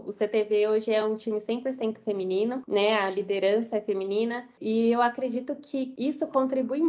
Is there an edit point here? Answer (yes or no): no